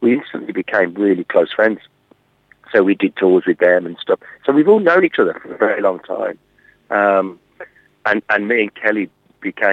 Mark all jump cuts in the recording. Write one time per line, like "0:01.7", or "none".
none